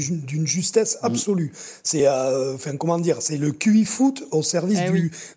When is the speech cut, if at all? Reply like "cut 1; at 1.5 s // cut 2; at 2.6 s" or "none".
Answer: none